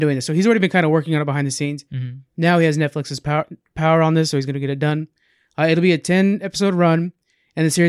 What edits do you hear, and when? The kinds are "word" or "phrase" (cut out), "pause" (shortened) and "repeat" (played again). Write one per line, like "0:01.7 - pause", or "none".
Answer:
none